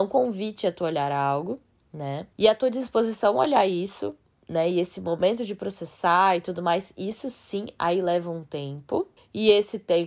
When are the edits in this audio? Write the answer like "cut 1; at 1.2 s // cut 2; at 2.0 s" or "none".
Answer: cut 1; at 2.3 s // cut 2; at 4.2 s // cut 3; at 9.2 s